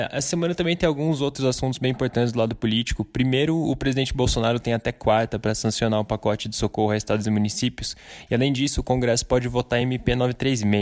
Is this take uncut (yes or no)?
yes